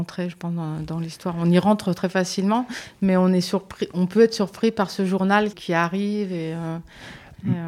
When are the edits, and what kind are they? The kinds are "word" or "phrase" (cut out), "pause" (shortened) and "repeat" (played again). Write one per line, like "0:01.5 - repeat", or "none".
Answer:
0:05.5 - word